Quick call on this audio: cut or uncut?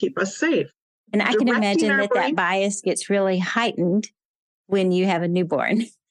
uncut